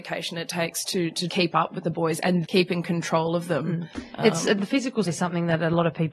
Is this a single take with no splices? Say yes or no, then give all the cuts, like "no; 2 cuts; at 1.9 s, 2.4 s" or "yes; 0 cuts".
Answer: no; 4 cuts; at 1.3 s, 2.4 s, 4.6 s, 5.1 s